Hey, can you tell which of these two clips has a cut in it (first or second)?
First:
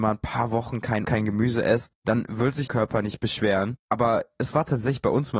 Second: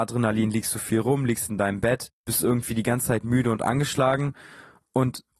first